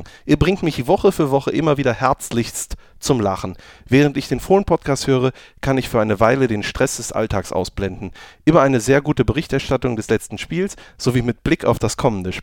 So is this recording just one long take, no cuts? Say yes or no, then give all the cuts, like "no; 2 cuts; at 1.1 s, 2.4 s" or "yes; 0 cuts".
yes; 0 cuts